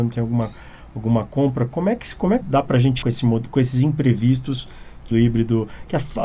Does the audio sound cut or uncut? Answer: cut